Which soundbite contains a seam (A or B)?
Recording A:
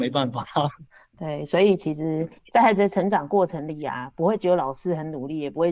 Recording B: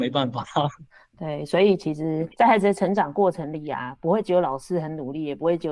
B